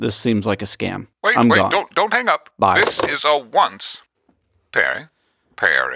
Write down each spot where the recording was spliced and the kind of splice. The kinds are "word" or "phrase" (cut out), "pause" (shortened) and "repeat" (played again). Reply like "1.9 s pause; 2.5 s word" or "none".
1.1 s pause; 4.1 s pause